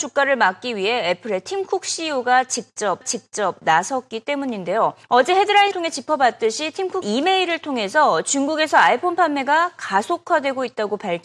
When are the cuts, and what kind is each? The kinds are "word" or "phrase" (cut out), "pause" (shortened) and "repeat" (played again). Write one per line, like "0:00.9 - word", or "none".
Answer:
0:03.0 - repeat
0:05.0 - pause
0:05.7 - word
0:07.0 - word